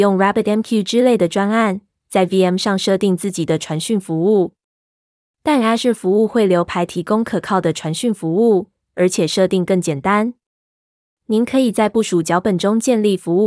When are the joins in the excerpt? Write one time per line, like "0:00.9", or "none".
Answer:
none